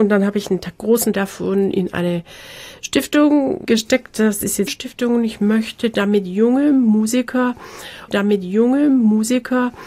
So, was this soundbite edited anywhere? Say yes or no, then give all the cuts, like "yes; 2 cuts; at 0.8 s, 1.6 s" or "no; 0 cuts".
yes; 3 cuts; at 1.1 s, 4.7 s, 8.1 s